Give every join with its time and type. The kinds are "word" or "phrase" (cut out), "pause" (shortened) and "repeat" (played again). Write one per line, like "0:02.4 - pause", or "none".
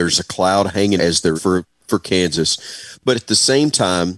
0:01.0 - word
0:01.4 - word
0:01.7 - pause